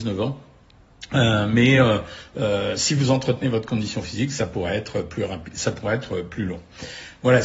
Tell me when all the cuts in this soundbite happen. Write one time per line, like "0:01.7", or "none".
none

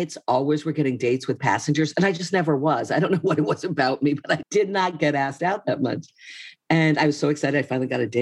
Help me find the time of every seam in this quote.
0:04.4

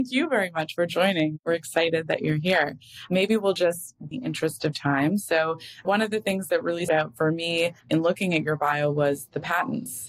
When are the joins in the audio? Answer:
0:04.1
0:06.9
0:07.8

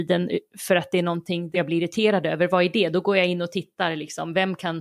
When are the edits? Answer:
0:01.5

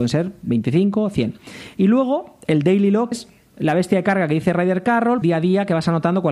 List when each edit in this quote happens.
0:03.1
0:05.2

